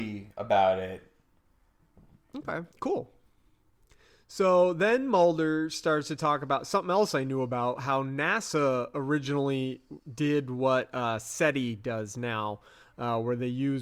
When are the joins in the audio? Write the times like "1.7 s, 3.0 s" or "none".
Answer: 2.7 s